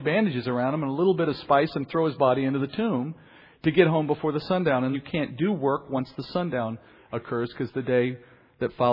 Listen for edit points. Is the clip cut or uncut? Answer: cut